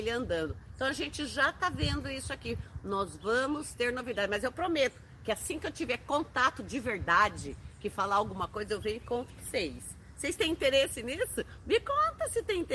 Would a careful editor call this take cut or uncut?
uncut